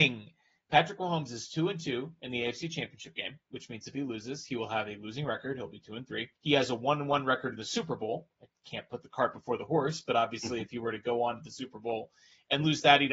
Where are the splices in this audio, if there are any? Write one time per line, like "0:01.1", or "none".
0:06.4